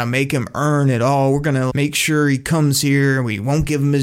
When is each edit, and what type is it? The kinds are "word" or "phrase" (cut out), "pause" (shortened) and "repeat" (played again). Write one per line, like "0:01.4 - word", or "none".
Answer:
0:01.7 - word